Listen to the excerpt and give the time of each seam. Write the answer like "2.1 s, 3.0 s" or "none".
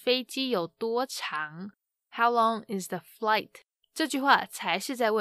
none